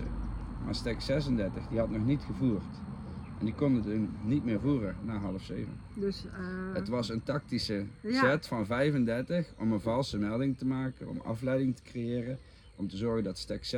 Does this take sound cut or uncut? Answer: uncut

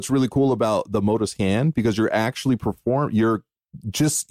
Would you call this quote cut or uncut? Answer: uncut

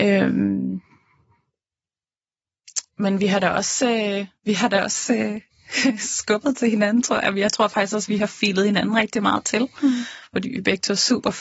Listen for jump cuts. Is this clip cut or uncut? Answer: cut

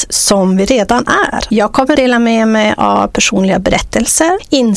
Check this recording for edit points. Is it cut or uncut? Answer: cut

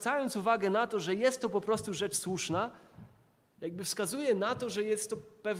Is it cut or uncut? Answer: uncut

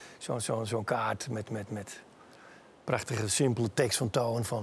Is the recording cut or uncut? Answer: uncut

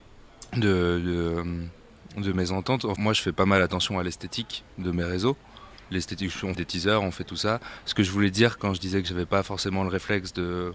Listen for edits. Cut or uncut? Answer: cut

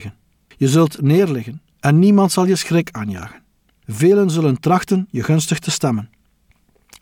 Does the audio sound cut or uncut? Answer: uncut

